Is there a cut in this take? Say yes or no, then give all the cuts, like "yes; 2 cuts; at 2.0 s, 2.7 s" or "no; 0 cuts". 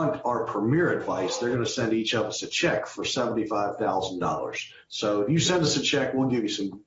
no; 0 cuts